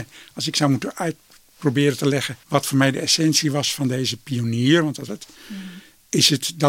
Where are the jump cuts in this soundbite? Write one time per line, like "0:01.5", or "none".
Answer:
0:02.4
0:05.1